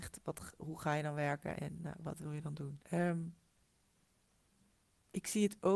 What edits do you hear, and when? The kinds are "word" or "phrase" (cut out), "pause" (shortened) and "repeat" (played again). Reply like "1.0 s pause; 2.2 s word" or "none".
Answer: 1.5 s word; 2.8 s pause